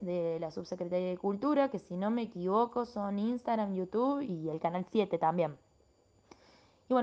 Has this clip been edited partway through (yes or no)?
no